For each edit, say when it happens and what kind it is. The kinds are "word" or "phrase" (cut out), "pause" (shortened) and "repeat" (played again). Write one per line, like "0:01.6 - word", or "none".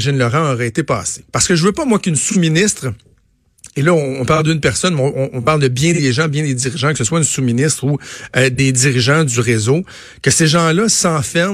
0:01.3 - pause